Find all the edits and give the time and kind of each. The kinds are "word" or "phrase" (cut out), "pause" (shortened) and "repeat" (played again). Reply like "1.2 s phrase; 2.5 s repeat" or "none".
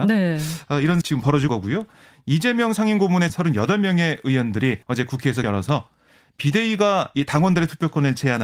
1.0 s word; 1.5 s word; 3.3 s phrase; 4.8 s pause; 5.4 s word